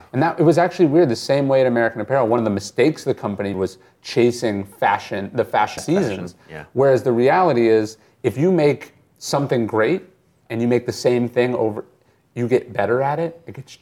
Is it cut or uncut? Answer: cut